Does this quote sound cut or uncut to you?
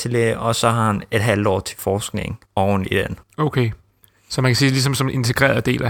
cut